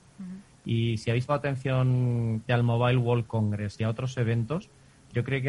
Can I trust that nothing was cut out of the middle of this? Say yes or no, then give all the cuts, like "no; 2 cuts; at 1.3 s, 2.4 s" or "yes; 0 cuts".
no; 2 cuts; at 1.3 s, 2.5 s